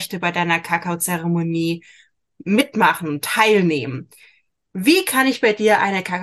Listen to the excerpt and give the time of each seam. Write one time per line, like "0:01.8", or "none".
none